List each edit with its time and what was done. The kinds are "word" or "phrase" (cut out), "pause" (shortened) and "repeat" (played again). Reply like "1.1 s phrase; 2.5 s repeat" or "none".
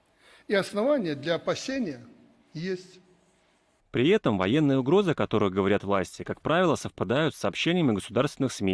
none